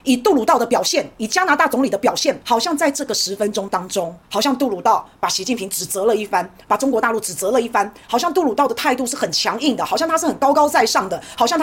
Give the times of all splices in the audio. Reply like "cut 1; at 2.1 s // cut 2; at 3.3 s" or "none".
cut 1; at 2.4 s // cut 2; at 4.2 s

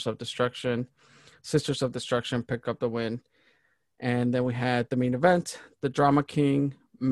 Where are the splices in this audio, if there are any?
none

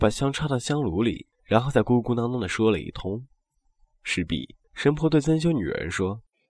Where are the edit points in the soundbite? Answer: cut 1; at 4.6 s

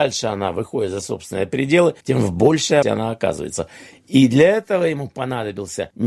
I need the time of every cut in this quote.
cut 1; at 1.0 s // cut 2; at 2.0 s // cut 3; at 2.8 s

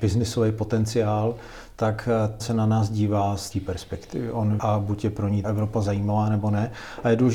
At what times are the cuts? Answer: cut 1; at 2.4 s // cut 2; at 3.5 s // cut 3; at 4.6 s // cut 4; at 5.4 s

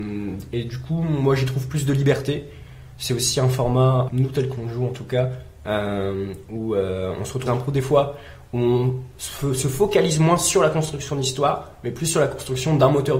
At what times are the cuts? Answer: cut 1; at 4.1 s // cut 2; at 7.5 s

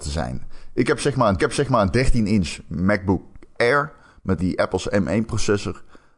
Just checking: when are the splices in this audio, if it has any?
cut 1; at 1.4 s // cut 2; at 4.4 s

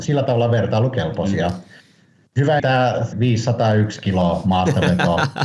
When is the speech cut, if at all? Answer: cut 1; at 2.6 s // cut 2; at 3.1 s

